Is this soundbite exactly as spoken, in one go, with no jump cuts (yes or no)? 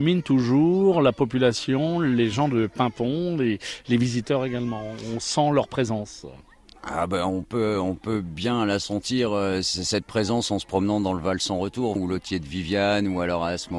no